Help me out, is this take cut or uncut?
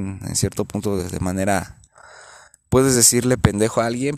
uncut